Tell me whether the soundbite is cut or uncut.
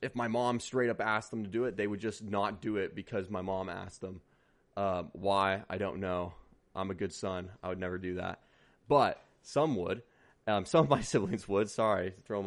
uncut